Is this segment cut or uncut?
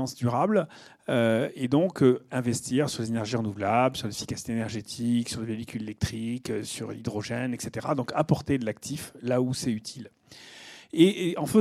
uncut